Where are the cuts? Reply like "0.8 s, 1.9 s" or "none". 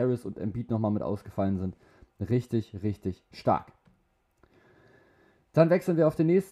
none